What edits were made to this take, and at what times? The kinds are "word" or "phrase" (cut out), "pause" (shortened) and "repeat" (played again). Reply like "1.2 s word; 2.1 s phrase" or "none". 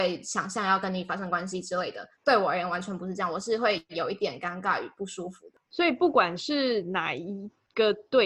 2.1 s pause; 5.6 s pause